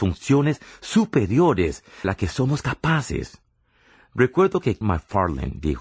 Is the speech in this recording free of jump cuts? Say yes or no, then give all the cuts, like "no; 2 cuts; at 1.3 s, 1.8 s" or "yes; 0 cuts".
no; 2 cuts; at 2.0 s, 4.8 s